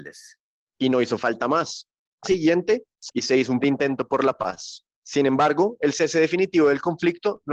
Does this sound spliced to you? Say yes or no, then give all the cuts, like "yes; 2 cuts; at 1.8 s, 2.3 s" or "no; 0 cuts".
yes; 3 cuts; at 2.2 s, 3.1 s, 3.6 s